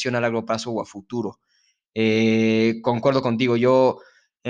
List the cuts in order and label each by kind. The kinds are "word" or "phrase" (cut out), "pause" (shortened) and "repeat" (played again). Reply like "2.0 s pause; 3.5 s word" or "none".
none